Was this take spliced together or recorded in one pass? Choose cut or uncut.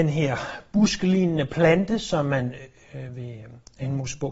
uncut